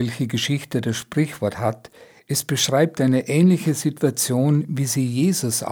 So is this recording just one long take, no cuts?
yes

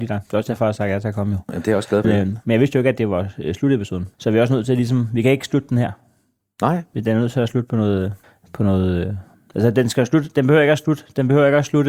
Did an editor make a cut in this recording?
yes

